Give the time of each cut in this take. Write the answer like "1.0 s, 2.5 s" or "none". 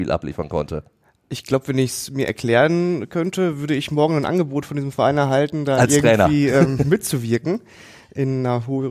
none